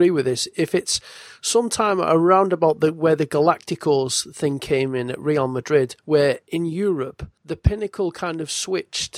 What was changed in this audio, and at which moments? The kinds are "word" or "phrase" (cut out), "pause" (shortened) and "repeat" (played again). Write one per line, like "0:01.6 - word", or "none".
none